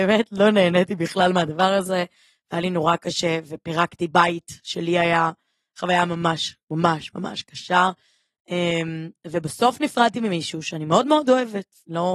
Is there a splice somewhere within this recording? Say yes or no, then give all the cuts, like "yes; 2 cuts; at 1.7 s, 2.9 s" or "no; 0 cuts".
no; 0 cuts